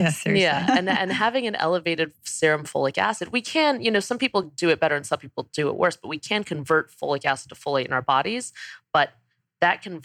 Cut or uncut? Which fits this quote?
uncut